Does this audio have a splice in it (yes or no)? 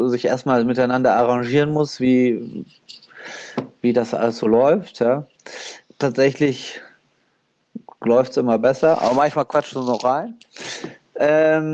no